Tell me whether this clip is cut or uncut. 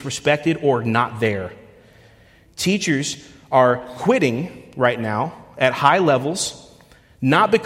uncut